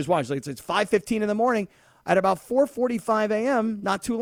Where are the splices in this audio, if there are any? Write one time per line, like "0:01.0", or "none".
none